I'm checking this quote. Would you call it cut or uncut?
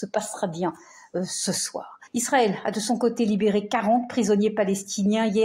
cut